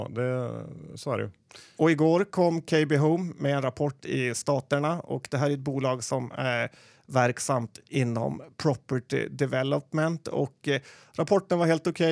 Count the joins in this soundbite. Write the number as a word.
zero